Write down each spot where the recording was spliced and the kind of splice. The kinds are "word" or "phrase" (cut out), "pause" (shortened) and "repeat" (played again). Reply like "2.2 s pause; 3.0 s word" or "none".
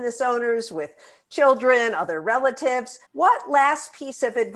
3.0 s pause